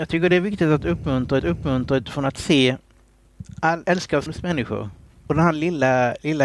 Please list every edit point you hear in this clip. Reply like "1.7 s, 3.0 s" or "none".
1.4 s, 3.8 s, 4.3 s, 5.1 s